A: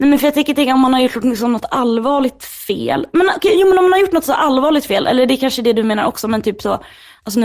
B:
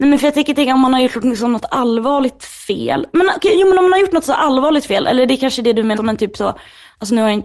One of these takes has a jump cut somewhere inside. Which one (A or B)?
B